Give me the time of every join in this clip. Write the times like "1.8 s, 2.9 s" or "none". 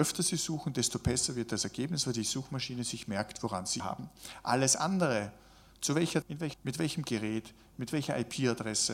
3.8 s, 6.2 s, 6.5 s